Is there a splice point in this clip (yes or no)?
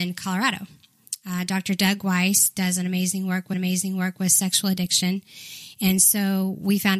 yes